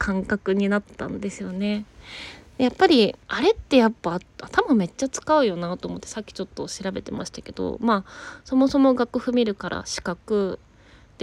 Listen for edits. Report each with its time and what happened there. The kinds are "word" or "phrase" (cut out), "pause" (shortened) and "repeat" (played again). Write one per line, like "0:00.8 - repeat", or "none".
0:03.2 - pause

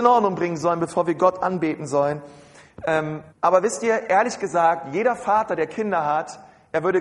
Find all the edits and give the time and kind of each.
0:03.3 - pause

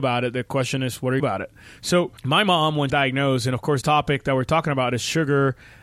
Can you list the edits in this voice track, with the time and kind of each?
0:01.2 - phrase
0:02.2 - pause
0:02.9 - phrase
0:03.8 - word

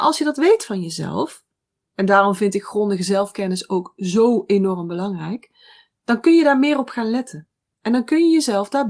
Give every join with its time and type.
none

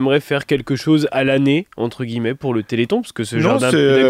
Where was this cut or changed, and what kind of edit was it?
none

